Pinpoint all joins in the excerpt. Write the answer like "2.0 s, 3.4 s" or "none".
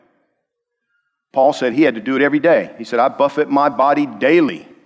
none